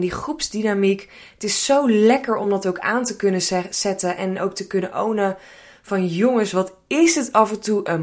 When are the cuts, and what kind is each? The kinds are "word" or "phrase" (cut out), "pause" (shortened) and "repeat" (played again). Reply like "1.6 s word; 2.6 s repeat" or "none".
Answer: none